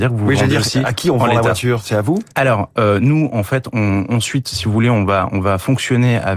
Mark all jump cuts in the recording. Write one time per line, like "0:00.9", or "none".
0:02.3